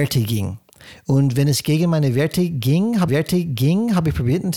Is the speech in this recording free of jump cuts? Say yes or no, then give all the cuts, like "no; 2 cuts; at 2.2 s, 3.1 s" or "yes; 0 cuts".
no; 1 cut; at 3.1 s